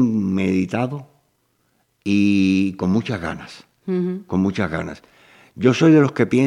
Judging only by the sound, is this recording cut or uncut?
uncut